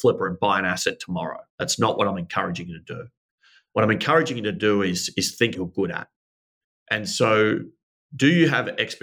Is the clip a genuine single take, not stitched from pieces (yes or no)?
no